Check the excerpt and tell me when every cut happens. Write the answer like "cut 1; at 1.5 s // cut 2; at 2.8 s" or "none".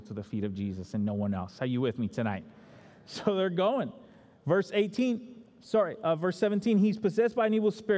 none